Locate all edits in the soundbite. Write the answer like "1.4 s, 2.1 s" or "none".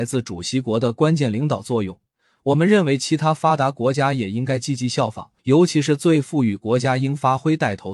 5.4 s

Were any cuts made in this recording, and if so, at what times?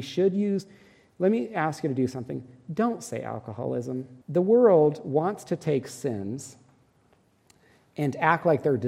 4.2 s

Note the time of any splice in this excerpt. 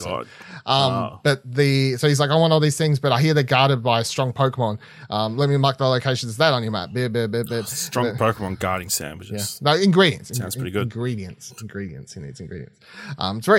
none

